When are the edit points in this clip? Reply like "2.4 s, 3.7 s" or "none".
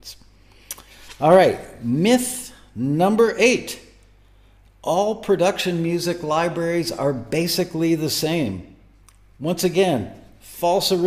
none